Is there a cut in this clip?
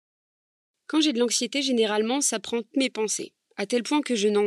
yes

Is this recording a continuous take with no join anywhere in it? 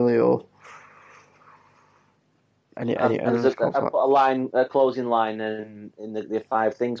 yes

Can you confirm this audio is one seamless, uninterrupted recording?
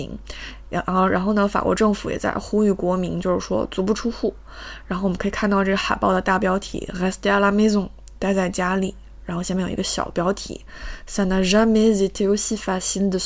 yes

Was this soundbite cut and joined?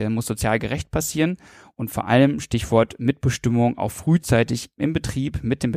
no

